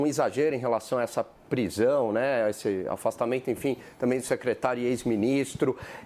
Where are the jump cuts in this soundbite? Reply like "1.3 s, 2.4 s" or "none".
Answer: none